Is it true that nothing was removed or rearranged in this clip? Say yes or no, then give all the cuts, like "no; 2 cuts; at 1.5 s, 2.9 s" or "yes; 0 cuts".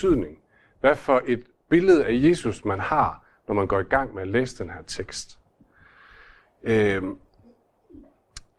yes; 0 cuts